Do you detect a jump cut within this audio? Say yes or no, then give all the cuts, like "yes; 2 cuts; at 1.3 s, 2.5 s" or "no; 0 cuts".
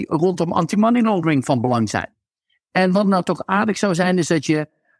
no; 0 cuts